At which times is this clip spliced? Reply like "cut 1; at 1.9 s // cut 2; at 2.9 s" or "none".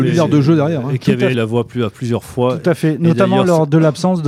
cut 1; at 1.3 s